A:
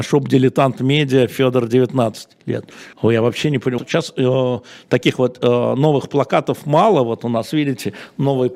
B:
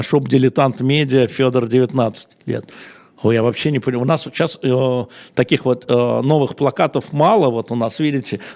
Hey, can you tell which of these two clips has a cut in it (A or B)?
A